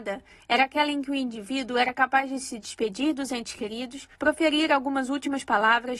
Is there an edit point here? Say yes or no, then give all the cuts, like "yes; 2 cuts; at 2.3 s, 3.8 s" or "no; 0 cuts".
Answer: yes; 1 cut; at 4.1 s